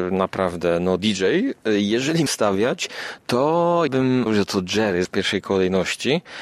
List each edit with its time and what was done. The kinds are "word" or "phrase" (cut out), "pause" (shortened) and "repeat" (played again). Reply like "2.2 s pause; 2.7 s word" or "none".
1.0 s word; 2.3 s word; 3.9 s word; 4.3 s word; 5.0 s word